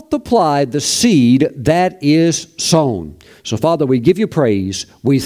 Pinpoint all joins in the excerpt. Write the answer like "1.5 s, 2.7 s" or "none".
none